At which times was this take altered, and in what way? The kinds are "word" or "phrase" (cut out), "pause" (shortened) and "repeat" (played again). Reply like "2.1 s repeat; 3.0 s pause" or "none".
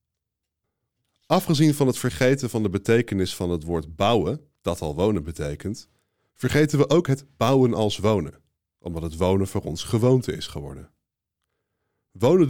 none